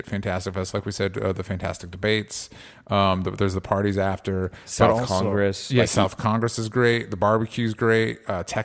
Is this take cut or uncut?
uncut